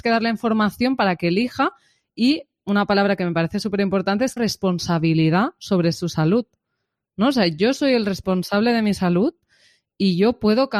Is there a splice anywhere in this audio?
yes; 1 cut; at 4.4 s

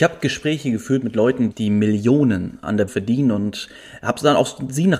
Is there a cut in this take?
yes; 2 cuts; at 1.5 s, 2.9 s

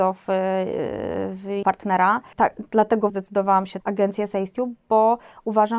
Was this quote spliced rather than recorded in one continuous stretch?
yes; 3 cuts; at 1.6 s, 3.1 s, 3.8 s

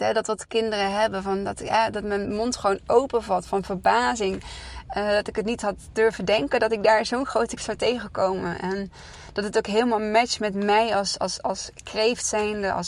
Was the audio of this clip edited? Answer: yes; 1 cut; at 7.6 s

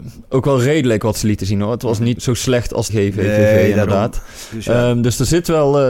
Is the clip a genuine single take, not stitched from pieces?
no; 2 cuts; at 2.2 s, 2.9 s

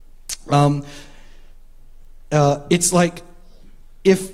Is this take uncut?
yes; 0 cuts

